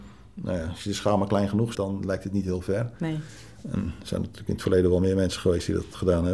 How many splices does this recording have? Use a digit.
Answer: 1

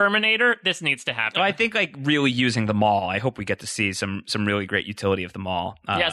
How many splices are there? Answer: 0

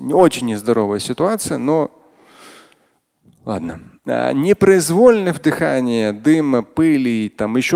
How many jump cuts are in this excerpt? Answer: 1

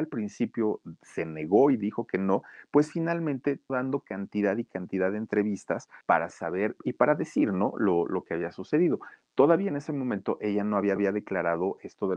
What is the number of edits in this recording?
4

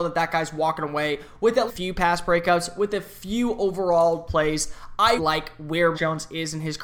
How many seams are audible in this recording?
4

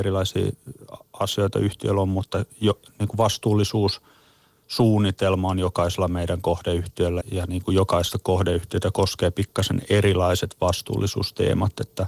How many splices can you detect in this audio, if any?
1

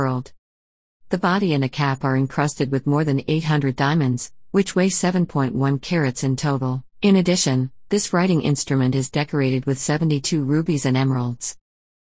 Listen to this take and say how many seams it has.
1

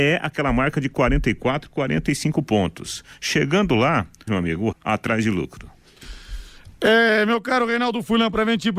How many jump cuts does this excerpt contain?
2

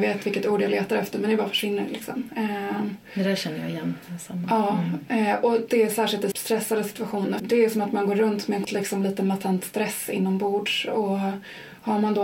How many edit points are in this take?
3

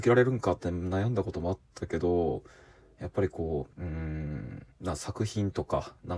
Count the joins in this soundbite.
2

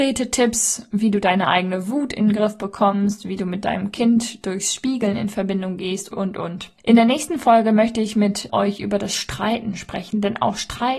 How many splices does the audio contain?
3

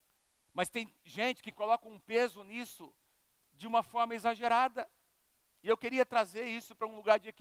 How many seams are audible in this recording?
0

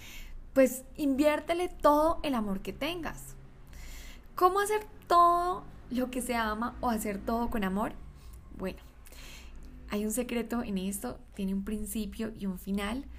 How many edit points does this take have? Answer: 0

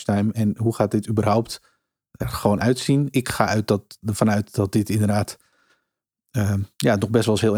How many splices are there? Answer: 1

